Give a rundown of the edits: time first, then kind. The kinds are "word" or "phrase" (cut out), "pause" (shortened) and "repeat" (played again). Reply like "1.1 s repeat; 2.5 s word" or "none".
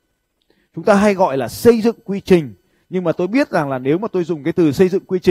none